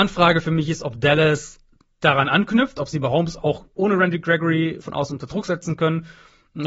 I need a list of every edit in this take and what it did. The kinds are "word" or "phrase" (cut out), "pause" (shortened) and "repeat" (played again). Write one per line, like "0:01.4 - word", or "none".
0:01.7 - pause
0:03.7 - pause
0:04.8 - word